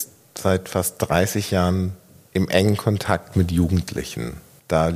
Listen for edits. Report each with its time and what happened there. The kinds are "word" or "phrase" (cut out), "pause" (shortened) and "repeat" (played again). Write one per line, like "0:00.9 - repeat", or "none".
none